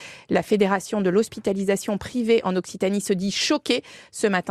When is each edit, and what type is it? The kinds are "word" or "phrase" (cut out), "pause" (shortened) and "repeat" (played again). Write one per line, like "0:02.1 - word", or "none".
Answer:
none